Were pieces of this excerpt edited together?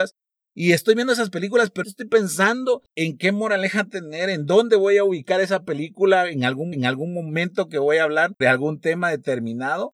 yes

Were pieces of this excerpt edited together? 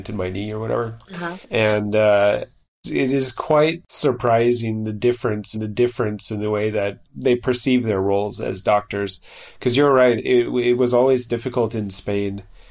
yes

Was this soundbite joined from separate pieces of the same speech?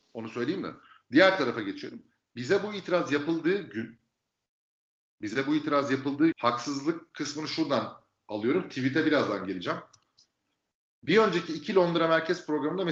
yes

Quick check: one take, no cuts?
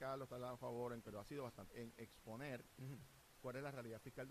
no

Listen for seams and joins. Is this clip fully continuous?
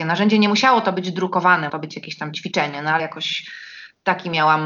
no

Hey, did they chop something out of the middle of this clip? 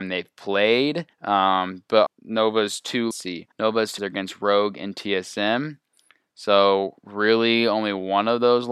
yes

